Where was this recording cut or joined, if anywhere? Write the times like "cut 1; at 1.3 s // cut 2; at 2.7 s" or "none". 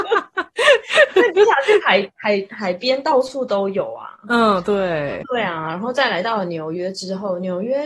cut 1; at 5.2 s